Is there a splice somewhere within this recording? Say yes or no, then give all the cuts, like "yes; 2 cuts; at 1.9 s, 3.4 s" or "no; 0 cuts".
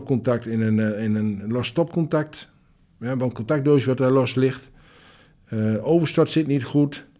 no; 0 cuts